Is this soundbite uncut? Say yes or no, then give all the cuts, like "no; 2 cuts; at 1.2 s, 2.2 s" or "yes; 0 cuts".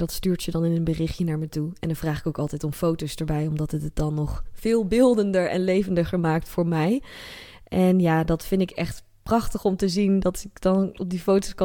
yes; 0 cuts